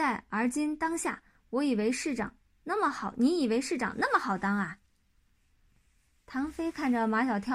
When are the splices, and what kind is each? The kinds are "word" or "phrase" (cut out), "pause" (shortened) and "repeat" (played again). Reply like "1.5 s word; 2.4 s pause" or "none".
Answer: none